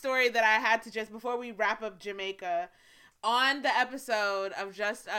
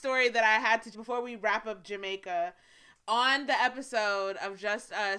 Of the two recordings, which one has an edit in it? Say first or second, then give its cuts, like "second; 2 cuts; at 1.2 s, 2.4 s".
second; 1 cut; at 0.9 s